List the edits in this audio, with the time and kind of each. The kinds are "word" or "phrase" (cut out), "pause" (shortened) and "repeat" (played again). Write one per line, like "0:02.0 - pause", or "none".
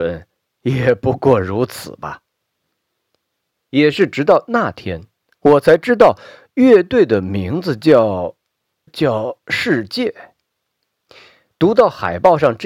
0:08.9 - word